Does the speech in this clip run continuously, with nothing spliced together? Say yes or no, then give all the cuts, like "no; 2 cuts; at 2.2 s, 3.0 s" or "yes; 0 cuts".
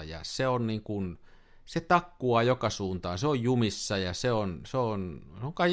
yes; 0 cuts